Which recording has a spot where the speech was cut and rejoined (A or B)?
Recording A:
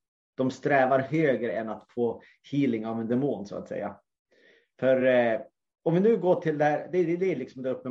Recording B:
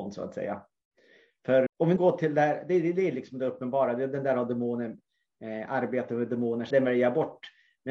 B